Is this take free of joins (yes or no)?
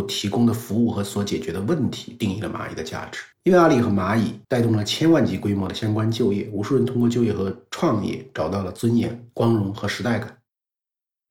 no